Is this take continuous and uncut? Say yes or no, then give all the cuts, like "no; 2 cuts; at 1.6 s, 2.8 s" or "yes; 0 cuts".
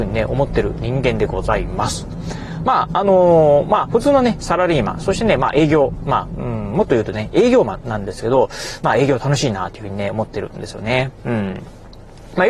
yes; 0 cuts